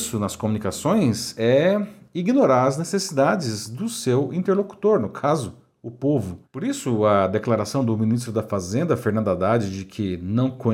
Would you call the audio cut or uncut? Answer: cut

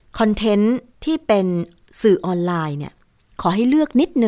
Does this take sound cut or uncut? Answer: uncut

